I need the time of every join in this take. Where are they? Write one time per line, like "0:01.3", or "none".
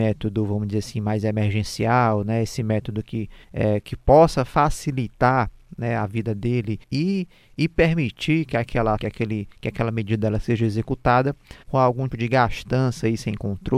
0:02.6
0:03.4
0:06.8
0:09.0
0:11.6
0:12.1